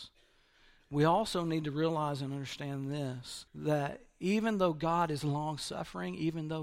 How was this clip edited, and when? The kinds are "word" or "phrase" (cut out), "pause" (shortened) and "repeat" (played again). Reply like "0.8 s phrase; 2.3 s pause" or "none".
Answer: 3.5 s pause